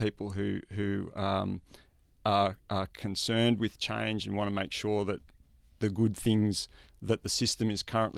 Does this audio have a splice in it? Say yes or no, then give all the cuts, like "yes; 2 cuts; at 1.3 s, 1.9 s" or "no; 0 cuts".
no; 0 cuts